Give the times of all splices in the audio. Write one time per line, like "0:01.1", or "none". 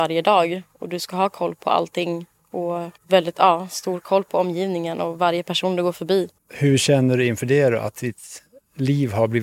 0:03.0
0:06.4